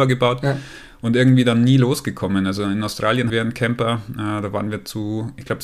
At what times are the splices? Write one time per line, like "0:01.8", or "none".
0:03.3